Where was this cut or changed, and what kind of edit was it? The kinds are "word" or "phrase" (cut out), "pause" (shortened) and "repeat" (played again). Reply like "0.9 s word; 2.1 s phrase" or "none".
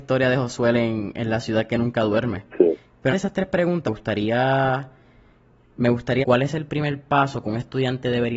3.1 s word; 3.9 s word; 6.2 s word